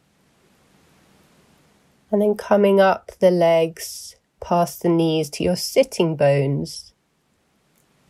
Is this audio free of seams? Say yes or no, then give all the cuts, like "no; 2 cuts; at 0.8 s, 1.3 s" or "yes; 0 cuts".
yes; 0 cuts